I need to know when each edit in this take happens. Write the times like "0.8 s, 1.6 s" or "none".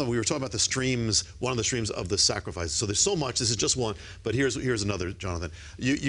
none